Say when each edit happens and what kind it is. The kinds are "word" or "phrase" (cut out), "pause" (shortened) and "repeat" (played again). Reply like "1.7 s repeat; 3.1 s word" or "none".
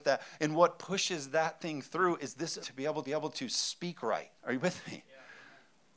2.6 s word; 3.1 s repeat; 4.4 s pause